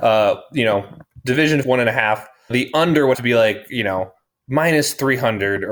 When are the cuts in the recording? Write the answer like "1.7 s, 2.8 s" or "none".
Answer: 1.6 s, 2.5 s, 3.1 s